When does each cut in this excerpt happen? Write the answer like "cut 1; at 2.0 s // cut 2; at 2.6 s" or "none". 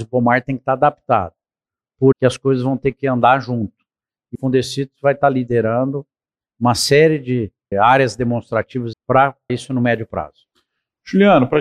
cut 1; at 2.1 s // cut 2; at 4.3 s // cut 3; at 7.7 s // cut 4; at 8.9 s // cut 5; at 9.5 s